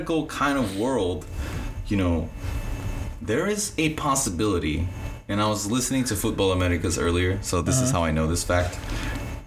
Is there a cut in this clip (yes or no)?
no